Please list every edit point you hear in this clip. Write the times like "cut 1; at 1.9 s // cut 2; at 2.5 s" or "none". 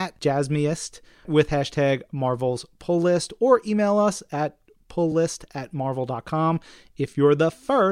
none